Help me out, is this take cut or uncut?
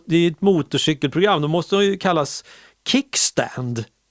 uncut